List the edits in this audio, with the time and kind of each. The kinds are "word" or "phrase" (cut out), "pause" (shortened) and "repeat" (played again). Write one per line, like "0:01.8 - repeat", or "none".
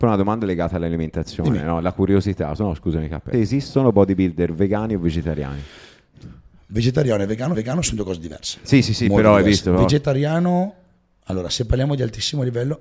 0:03.3 - phrase
0:07.5 - repeat